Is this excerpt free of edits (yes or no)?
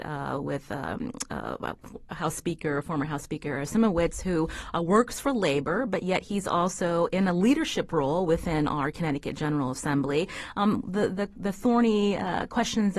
yes